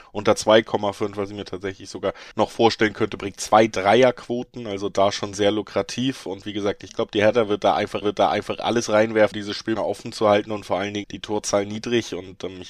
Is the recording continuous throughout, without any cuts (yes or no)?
no